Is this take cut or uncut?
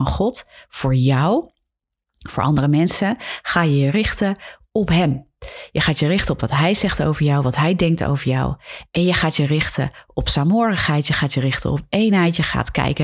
uncut